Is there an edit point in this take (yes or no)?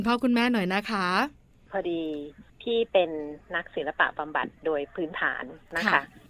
yes